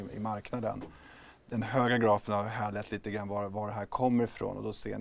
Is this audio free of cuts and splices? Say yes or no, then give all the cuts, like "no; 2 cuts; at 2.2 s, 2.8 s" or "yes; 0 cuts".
yes; 0 cuts